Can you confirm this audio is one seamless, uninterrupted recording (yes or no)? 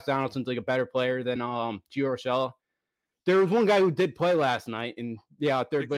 yes